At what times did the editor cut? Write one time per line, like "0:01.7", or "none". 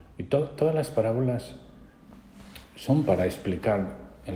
none